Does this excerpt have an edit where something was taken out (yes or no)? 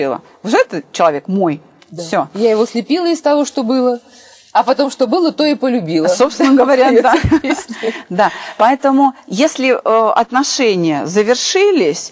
no